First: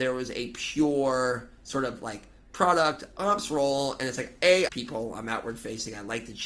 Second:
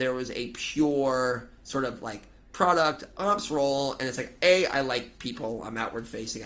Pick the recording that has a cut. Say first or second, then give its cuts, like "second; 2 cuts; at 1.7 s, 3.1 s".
first; 1 cut; at 4.7 s